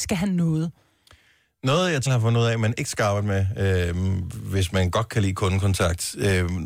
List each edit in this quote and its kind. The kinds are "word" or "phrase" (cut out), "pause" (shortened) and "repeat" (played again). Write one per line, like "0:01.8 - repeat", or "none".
0:02.1 - word